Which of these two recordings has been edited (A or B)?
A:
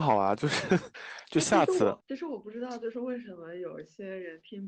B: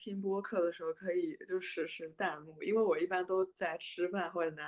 A